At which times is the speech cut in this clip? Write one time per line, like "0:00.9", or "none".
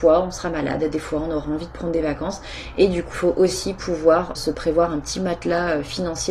0:03.1
0:04.3